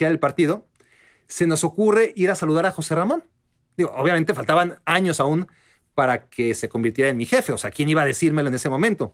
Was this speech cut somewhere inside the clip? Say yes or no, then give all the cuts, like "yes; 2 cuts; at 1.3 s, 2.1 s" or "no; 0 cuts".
no; 0 cuts